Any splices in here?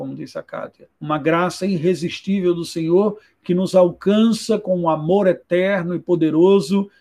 yes; 1 cut; at 0.9 s

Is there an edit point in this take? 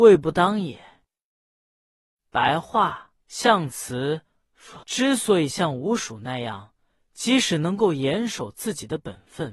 yes; 2 cuts; at 3.2 s, 4.8 s

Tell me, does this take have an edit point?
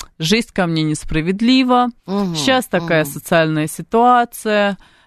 yes; 1 cut; at 2.0 s

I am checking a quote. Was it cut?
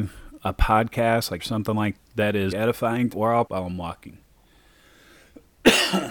yes; 5 cuts; at 1.4 s, 2.0 s, 2.5 s, 3.1 s, 3.5 s

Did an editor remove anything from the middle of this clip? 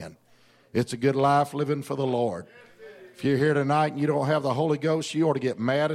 no; 0 cuts

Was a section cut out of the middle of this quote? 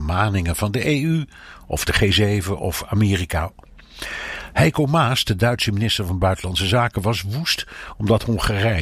no; 0 cuts

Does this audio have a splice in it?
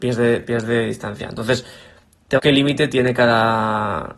yes; 1 cut; at 2.4 s

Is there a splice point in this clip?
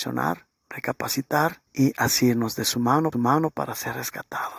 yes; 2 cuts; at 1.7 s, 3.1 s

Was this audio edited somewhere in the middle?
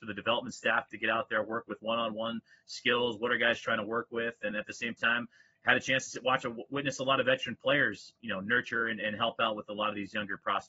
no; 0 cuts

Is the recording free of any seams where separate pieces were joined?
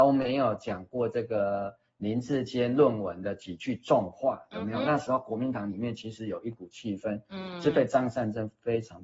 yes; 0 cuts

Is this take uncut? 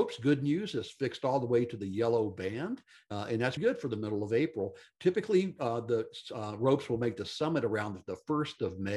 no; 1 cut; at 3.6 s

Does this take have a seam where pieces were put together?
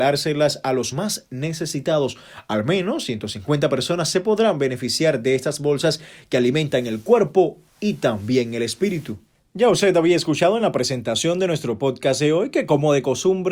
no; 0 cuts

